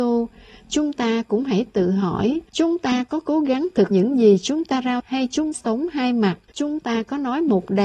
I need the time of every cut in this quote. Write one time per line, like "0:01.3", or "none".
0:02.5
0:03.9
0:05.0
0:05.5
0:06.5